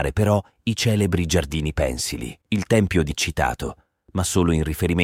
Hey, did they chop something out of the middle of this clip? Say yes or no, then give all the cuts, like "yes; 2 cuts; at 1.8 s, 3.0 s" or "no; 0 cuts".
yes; 2 cuts; at 2.4 s, 3.1 s